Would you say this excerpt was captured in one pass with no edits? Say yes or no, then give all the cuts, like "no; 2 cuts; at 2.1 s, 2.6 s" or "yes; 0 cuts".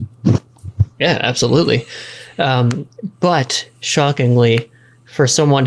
no; 1 cut; at 0.9 s